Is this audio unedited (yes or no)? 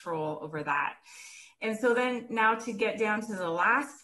yes